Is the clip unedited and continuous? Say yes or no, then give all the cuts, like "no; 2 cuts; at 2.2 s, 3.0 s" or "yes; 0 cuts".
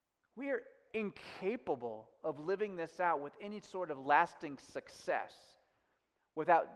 yes; 0 cuts